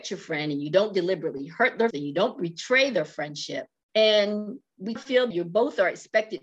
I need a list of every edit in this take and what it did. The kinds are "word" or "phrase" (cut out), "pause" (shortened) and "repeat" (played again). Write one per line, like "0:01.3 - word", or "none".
0:01.9 - word
0:05.0 - word
0:05.3 - word